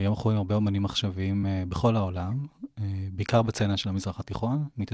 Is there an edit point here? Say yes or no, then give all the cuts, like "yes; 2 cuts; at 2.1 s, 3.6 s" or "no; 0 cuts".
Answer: no; 0 cuts